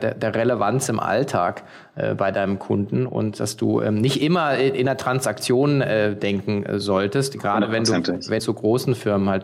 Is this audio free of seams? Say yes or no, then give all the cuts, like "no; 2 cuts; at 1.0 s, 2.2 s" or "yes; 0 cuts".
no; 1 cut; at 8.4 s